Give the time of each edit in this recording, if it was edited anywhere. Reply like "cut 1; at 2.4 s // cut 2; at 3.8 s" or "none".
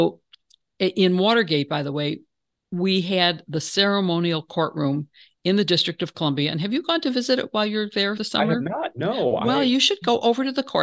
cut 1; at 8.2 s